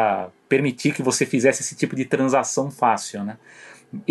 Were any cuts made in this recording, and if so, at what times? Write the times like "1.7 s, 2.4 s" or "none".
none